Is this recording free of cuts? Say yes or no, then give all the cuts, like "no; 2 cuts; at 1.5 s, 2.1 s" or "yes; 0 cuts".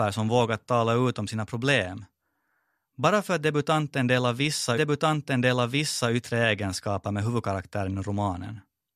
no; 1 cut; at 4.7 s